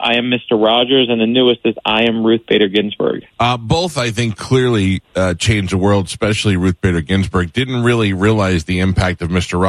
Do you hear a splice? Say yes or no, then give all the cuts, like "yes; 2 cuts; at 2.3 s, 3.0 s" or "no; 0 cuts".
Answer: yes; 2 cuts; at 3.3 s, 5.0 s